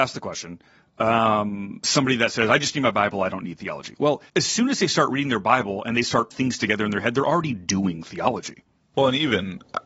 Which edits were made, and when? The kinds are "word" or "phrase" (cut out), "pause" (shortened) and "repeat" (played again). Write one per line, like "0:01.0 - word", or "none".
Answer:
0:04.3 - pause
0:06.3 - word